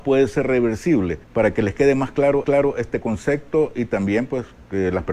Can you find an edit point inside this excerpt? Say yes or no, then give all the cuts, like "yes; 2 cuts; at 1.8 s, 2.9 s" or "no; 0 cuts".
yes; 2 cuts; at 1.2 s, 2.4 s